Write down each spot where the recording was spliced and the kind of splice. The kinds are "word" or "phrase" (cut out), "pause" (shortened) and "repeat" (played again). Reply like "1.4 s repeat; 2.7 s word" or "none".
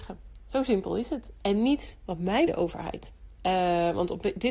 2.5 s phrase